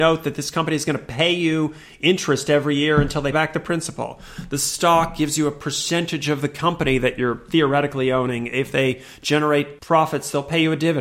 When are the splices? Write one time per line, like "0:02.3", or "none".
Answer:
0:03.3